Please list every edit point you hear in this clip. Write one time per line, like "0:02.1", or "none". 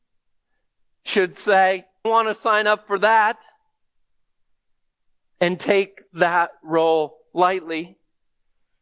0:02.0
0:06.1